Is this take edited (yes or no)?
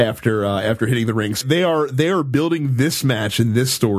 yes